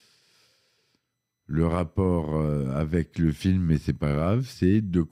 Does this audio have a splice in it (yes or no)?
no